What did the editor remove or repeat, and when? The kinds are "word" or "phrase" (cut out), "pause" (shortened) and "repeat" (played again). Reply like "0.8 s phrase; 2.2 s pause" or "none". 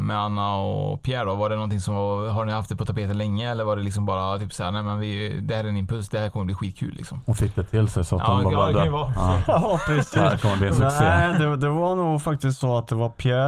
none